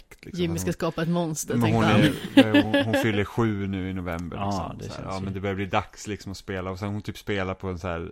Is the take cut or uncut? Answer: uncut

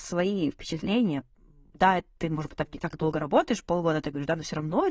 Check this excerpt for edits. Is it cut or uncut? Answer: uncut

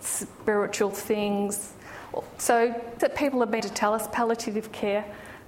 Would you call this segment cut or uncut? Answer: cut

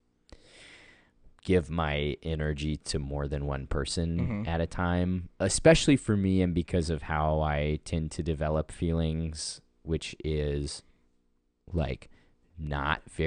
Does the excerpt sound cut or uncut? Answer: uncut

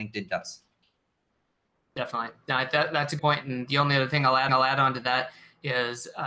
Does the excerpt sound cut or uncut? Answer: cut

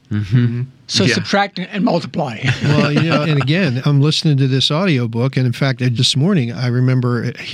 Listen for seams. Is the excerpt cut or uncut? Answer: cut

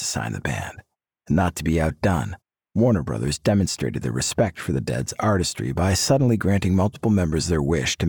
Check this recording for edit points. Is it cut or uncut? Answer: uncut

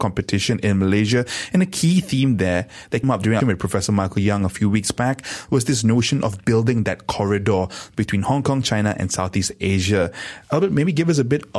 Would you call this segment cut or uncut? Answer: cut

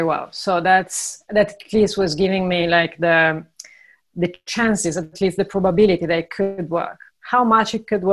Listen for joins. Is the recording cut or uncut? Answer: uncut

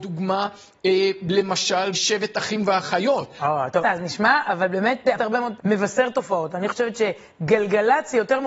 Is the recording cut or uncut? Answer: cut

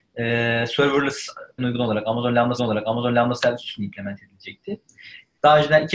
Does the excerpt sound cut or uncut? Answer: cut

